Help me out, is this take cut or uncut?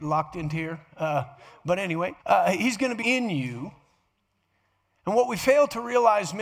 cut